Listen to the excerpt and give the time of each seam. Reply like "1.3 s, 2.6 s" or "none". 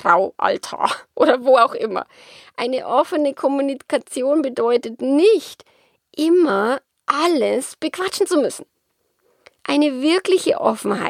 none